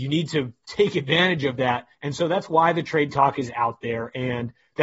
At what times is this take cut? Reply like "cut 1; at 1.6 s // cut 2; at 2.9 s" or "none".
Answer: cut 1; at 1.9 s